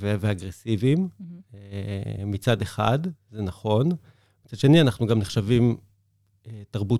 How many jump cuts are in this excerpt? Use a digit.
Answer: 0